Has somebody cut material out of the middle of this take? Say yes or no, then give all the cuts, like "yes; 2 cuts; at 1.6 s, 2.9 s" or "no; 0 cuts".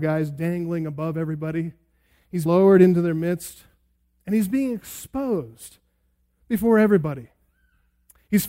yes; 1 cut; at 2.5 s